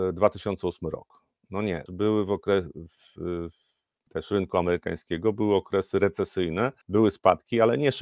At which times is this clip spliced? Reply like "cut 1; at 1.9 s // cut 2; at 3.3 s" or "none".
cut 1; at 1.9 s // cut 2; at 4.1 s // cut 3; at 6.8 s

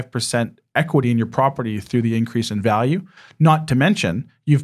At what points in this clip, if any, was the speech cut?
none

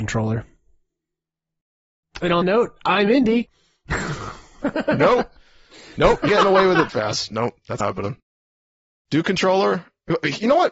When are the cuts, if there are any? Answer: cut 1; at 2.4 s // cut 2; at 6.3 s // cut 3; at 6.9 s // cut 4; at 7.8 s

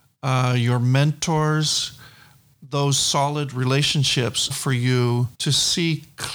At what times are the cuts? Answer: cut 1; at 4.5 s // cut 2; at 5.3 s

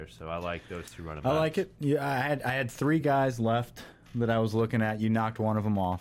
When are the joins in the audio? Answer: none

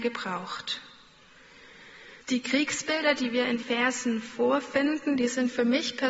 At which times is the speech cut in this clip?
cut 1; at 2.2 s // cut 2; at 3.6 s

